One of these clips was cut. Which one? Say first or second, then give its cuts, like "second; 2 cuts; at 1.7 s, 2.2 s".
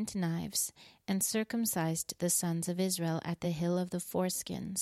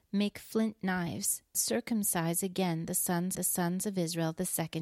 second; 2 cuts; at 1.5 s, 3.3 s